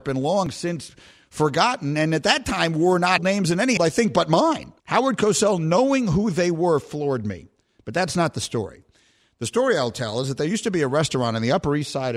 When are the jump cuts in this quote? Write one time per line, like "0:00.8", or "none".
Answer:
0:03.2
0:03.8
0:04.8